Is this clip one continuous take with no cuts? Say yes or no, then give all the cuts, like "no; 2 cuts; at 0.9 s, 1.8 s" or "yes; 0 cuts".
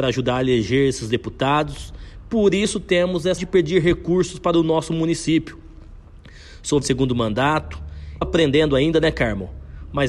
no; 3 cuts; at 3.4 s, 6.8 s, 8.2 s